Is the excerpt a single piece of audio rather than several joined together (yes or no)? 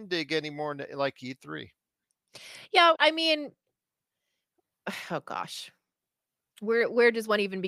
no